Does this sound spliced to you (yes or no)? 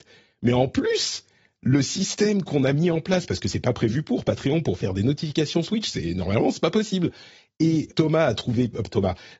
yes